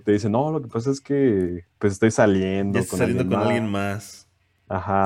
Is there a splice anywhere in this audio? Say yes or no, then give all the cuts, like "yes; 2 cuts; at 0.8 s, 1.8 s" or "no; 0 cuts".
no; 0 cuts